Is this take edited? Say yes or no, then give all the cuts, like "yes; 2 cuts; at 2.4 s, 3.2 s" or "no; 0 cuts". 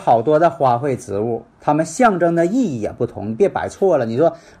yes; 1 cut; at 1.5 s